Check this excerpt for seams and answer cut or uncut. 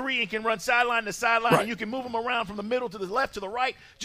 uncut